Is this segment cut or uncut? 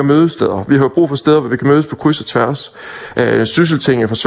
uncut